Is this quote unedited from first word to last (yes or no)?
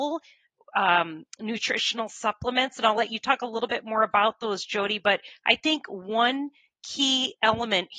yes